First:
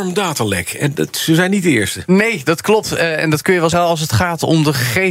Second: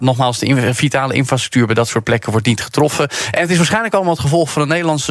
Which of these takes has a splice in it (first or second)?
first